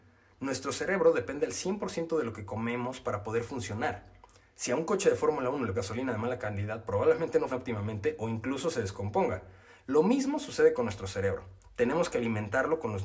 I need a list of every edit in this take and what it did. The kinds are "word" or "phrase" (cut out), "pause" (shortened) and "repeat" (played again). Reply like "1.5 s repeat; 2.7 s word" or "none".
5.7 s word; 7.5 s word